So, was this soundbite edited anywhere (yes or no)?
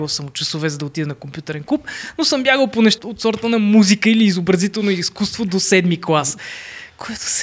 yes